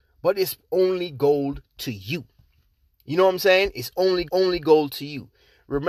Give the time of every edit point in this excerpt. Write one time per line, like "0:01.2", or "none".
0:04.3